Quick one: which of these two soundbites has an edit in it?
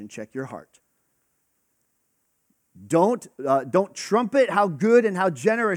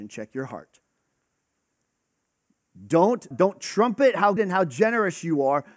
second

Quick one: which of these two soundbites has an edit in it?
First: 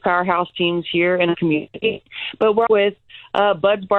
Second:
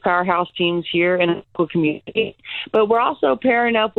first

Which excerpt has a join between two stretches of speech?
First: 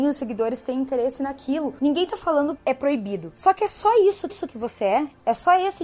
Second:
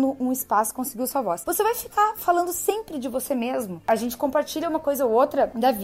first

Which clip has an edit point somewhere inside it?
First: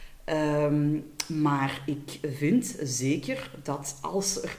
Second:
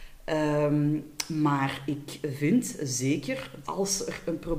second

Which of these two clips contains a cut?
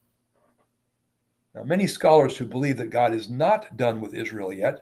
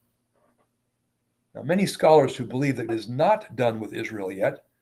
second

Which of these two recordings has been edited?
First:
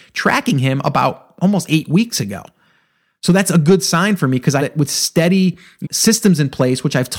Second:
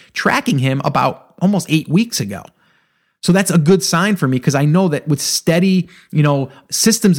first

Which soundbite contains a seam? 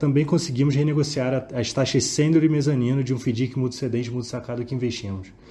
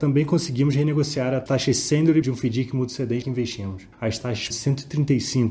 second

